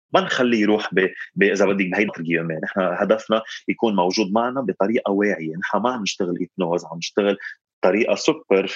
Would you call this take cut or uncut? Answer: cut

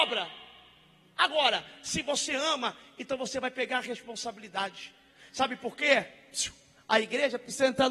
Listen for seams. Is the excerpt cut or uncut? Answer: uncut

